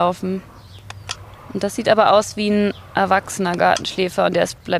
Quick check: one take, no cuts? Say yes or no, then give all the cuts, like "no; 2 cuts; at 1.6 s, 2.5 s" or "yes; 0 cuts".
yes; 0 cuts